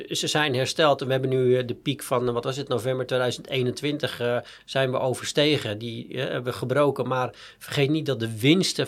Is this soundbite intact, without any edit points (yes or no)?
yes